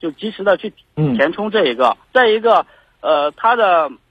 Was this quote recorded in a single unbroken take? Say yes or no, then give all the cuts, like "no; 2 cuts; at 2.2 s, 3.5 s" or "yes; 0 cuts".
no; 1 cut; at 2.0 s